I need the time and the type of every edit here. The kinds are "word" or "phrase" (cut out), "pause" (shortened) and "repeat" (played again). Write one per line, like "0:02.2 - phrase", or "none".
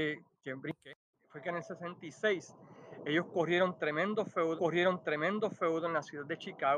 0:01.1 - pause
0:04.6 - repeat